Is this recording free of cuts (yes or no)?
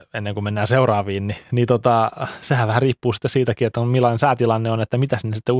yes